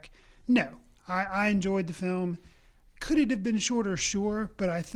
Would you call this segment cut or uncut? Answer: uncut